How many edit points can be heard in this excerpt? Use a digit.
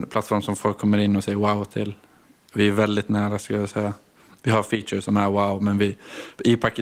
0